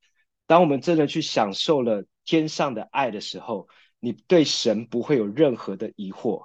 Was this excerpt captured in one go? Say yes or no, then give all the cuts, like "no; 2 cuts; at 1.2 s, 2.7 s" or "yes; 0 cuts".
yes; 0 cuts